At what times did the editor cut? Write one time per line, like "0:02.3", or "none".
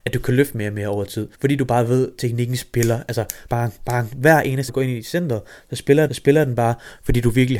0:01.3
0:03.5
0:04.7
0:06.1